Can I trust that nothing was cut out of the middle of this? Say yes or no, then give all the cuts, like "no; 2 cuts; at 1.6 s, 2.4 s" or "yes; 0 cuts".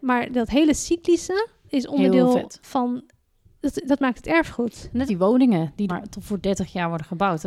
no; 3 cuts; at 1.7 s, 5.1 s, 5.9 s